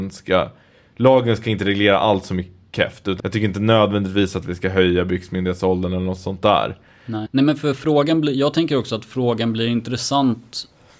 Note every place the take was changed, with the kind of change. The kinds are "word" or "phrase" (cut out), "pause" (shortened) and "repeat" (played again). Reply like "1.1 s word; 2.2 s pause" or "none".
3.2 s word; 7.3 s word

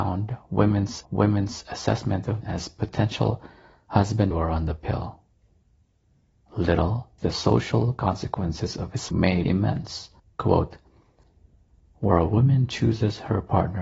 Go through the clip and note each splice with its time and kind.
1.0 s repeat; 2.4 s word; 4.3 s phrase; 7.2 s word; 9.1 s word; 9.4 s word; 10.2 s pause

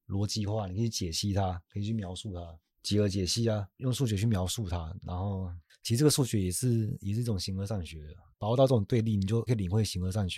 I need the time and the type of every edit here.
8.3 s pause

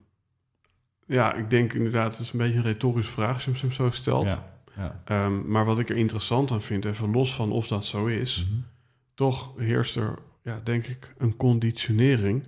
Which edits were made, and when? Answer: 3.6 s repeat

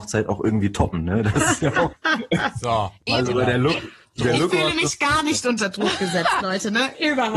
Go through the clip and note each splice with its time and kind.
none

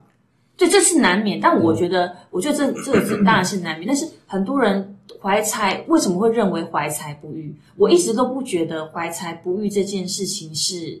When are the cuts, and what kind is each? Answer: none

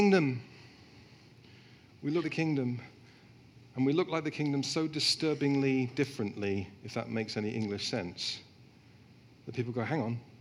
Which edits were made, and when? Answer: 2.2 s word

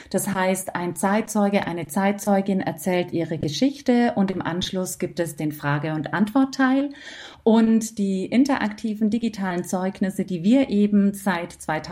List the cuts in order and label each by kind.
none

